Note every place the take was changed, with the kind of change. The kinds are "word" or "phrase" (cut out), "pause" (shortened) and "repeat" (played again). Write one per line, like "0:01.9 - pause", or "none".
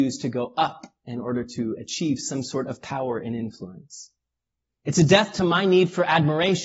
none